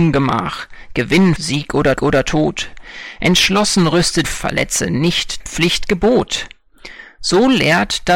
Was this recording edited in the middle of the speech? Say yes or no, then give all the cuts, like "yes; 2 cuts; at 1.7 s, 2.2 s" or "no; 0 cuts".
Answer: yes; 4 cuts; at 1.4 s, 2.0 s, 4.2 s, 5.4 s